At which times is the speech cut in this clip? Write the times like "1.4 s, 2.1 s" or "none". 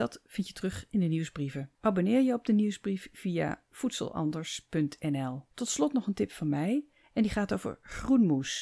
1.7 s, 5.5 s